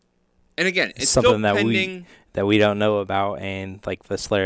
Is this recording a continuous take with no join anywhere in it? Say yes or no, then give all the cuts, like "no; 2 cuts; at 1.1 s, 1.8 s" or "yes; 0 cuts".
yes; 0 cuts